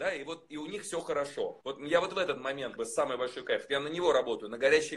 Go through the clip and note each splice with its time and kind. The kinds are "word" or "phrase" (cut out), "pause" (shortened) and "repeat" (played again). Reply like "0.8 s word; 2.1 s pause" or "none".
1.6 s pause; 2.8 s word